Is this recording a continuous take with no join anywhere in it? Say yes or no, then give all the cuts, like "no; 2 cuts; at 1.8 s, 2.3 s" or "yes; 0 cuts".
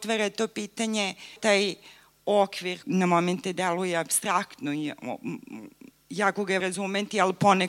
no; 4 cuts; at 1.4 s, 2.8 s, 5.9 s, 6.6 s